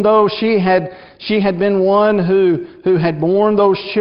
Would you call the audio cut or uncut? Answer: uncut